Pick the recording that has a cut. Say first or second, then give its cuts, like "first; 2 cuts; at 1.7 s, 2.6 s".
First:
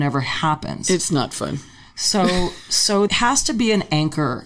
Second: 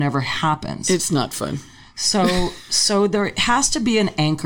first; 1 cut; at 3.1 s